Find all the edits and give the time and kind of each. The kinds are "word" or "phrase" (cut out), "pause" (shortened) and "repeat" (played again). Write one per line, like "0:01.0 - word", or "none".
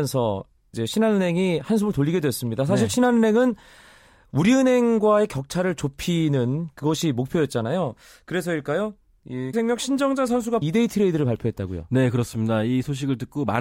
0:09.5 - word
0:10.6 - word